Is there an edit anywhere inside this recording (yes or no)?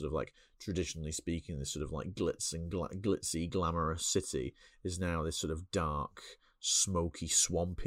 no